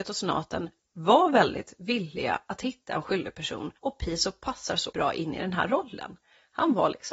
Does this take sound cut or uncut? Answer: cut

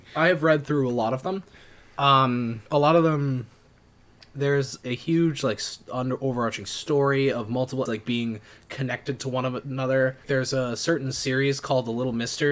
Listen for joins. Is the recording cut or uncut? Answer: cut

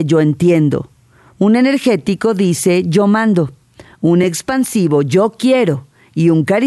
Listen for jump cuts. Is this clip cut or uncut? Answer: uncut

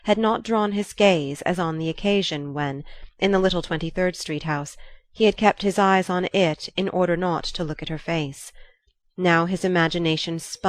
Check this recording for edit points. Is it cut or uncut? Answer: uncut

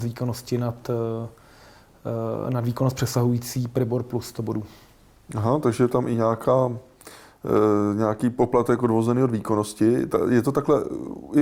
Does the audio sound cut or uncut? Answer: uncut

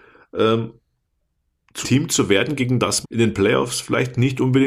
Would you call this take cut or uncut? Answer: cut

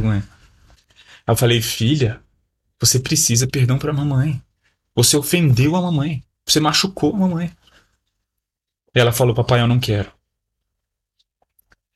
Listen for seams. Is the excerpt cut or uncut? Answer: cut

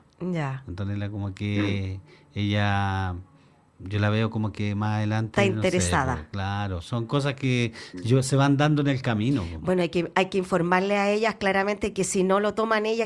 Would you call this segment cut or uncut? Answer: uncut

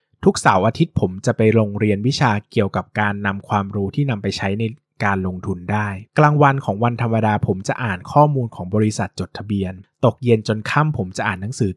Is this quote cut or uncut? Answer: cut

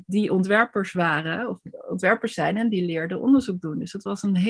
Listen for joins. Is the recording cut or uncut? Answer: uncut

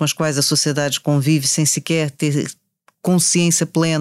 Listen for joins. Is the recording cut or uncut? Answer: uncut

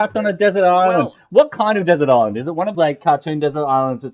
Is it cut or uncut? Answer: cut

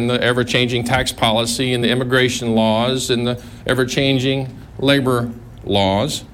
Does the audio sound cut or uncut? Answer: uncut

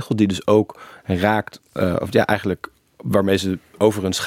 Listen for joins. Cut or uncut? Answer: uncut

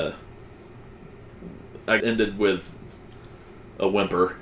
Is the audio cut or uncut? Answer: cut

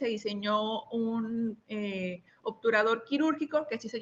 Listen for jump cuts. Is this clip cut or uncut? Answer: uncut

